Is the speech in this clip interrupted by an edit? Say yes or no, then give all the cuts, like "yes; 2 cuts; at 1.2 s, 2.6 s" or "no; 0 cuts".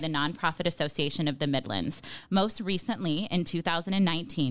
no; 0 cuts